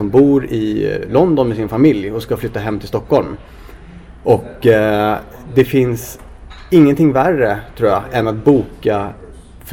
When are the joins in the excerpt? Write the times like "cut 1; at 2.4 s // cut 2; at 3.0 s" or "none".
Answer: none